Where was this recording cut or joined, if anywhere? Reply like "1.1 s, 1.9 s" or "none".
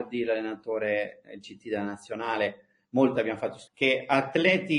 3.1 s, 3.7 s